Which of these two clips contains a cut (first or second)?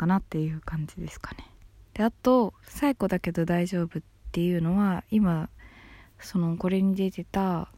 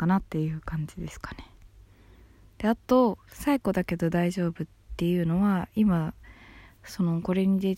first